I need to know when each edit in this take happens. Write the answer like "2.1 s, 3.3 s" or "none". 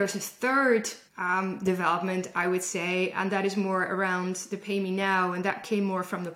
1.1 s